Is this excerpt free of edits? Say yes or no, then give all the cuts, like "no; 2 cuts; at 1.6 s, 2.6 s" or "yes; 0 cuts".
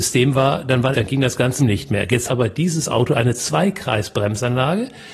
no; 3 cuts; at 0.9 s, 1.6 s, 2.3 s